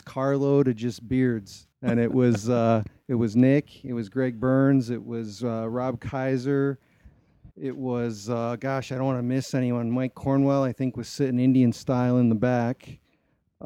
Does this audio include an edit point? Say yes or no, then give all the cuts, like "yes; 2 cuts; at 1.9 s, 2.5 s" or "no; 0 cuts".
yes; 2 cuts; at 1.7 s, 7.5 s